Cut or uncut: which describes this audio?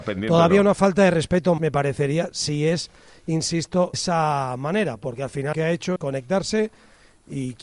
cut